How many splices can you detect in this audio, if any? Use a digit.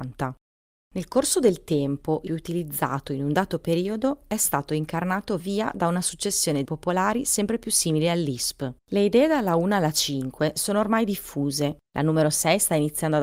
5